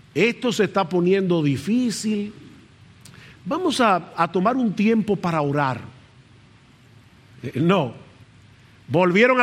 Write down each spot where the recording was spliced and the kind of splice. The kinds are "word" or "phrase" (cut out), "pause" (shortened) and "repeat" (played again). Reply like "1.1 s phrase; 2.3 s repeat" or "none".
none